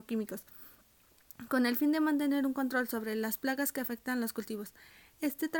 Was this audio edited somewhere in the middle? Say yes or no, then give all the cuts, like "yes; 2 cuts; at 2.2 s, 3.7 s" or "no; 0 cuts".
no; 0 cuts